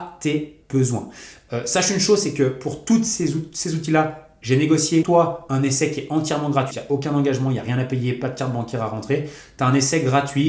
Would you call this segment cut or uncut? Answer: cut